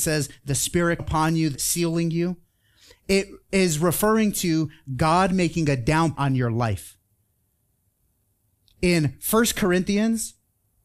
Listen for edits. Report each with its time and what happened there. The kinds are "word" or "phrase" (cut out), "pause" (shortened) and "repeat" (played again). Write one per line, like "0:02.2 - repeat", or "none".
0:01.0 - word
0:01.5 - word
0:06.2 - word